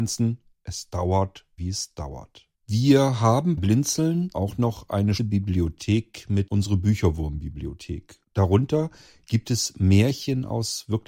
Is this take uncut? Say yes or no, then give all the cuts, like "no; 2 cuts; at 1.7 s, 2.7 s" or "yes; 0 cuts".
no; 7 cuts; at 1.6 s, 2.5 s, 3.6 s, 4.3 s, 5.2 s, 6.5 s, 8.2 s